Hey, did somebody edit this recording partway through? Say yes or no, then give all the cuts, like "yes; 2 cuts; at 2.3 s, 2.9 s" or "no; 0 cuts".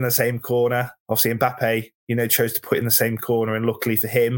no; 0 cuts